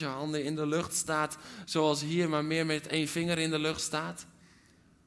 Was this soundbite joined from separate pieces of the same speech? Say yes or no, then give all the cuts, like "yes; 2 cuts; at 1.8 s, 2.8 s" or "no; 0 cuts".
no; 0 cuts